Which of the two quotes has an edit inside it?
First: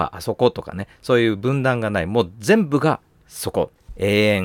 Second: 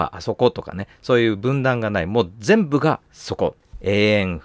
second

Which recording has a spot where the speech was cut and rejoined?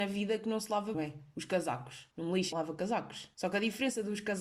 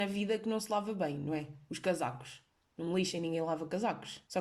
first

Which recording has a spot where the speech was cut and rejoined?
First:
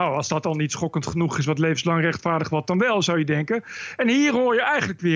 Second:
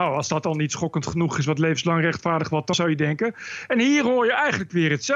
second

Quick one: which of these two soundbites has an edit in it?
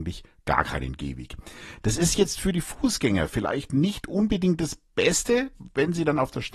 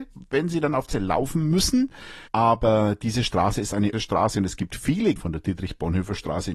second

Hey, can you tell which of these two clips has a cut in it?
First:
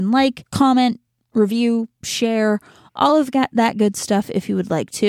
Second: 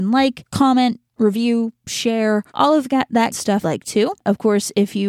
second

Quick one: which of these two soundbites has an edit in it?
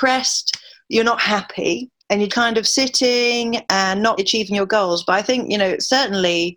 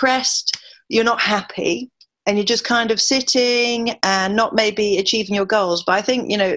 first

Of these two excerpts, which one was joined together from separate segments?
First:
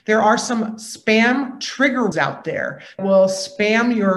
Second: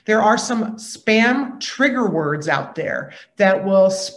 first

